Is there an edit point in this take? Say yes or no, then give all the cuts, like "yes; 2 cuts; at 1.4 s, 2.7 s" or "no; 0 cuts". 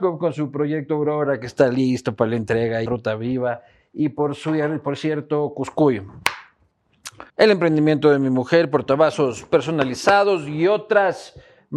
yes; 2 cuts; at 2.9 s, 7.3 s